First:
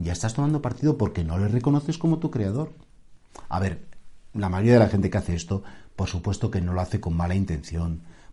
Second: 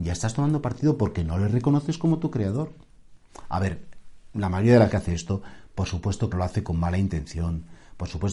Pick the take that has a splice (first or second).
second